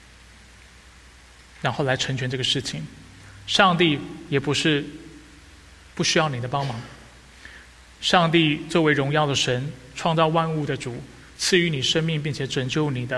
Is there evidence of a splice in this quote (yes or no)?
no